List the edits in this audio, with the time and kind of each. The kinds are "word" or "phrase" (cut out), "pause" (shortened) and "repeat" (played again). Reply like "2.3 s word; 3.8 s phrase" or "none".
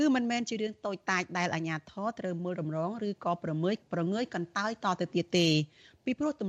3.8 s pause